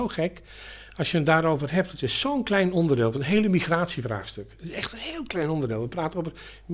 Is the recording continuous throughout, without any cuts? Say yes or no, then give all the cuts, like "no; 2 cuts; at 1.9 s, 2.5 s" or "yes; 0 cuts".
yes; 0 cuts